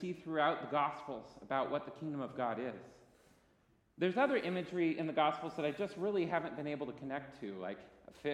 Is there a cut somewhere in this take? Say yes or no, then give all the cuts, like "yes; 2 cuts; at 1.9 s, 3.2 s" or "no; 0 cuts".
no; 0 cuts